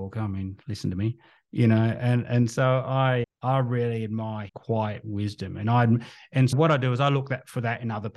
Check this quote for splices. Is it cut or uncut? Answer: cut